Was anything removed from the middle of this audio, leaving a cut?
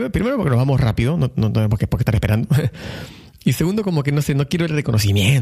no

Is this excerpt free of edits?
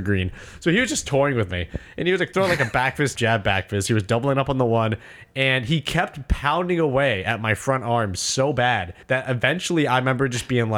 no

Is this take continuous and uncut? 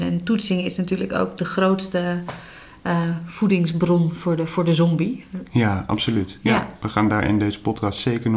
yes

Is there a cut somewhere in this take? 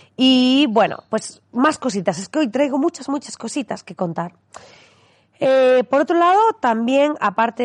no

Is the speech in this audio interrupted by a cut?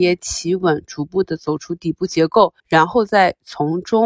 yes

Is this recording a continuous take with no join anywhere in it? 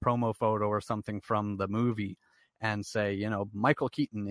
yes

